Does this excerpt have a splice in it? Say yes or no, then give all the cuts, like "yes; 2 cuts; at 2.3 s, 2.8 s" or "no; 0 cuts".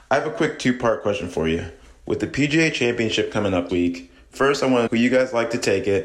yes; 2 cuts; at 3.7 s, 4.9 s